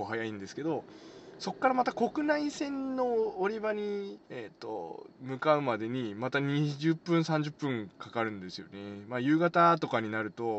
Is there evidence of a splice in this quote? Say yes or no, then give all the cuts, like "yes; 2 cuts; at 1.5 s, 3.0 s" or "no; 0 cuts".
yes; 1 cut; at 4.2 s